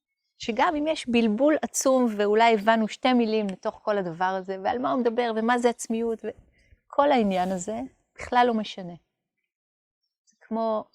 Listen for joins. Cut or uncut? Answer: uncut